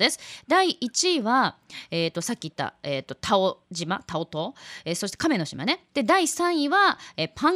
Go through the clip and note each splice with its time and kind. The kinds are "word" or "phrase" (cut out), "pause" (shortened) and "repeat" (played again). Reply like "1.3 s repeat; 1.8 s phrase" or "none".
5.9 s pause